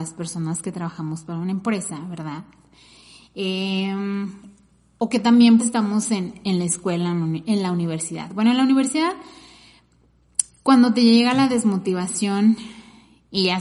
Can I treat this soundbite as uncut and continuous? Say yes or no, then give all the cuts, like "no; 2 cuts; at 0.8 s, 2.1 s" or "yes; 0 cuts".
no; 1 cut; at 5.6 s